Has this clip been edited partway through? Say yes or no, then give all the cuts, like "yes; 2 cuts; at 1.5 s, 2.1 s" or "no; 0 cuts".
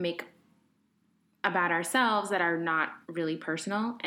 yes; 1 cut; at 3.0 s